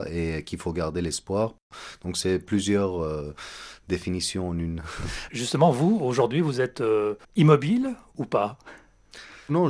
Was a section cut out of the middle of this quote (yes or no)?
yes